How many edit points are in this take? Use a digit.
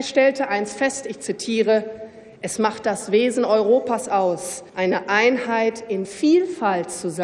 2